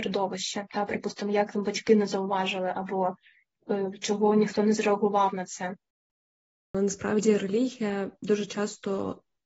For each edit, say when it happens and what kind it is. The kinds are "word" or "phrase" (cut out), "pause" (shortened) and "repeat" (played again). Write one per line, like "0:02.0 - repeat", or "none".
none